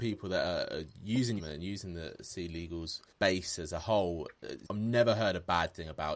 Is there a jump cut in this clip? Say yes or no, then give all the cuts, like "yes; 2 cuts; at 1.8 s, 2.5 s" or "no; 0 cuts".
yes; 3 cuts; at 1.4 s, 3.1 s, 4.6 s